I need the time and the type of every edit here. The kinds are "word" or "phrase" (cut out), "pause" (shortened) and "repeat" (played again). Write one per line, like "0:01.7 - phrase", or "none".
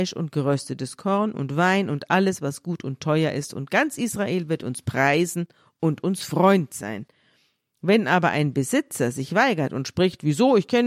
none

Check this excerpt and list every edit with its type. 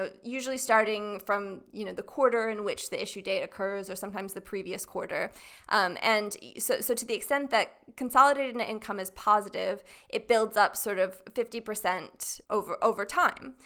0:12.4 - pause

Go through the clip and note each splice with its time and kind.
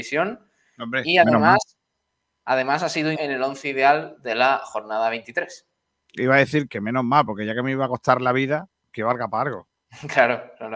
0:03.1 - word
0:06.7 - word

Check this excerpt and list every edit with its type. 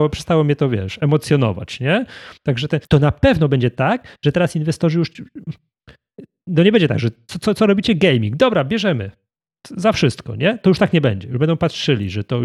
0:02.9 - pause

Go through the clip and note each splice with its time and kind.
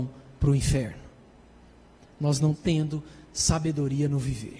0:02.5 - word

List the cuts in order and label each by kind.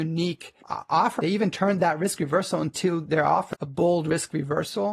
0:01.2 - word

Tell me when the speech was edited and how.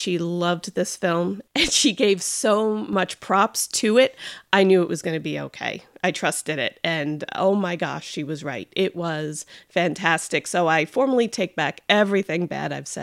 none

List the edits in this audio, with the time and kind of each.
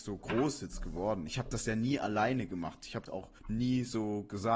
0:03.1 - word
0:03.4 - pause

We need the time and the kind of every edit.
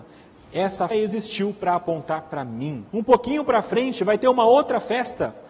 0:00.9 - word
0:02.9 - pause

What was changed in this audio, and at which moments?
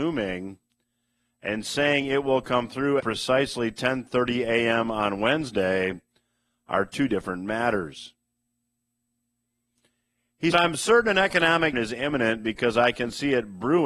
0:03.0 - word
0:10.5 - word
0:11.7 - word

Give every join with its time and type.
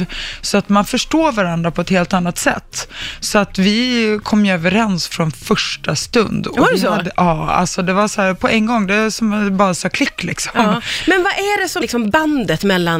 0:11.8 - word

